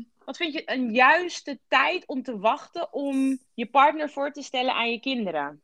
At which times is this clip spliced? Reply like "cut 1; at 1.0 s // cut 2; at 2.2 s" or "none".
cut 1; at 3.5 s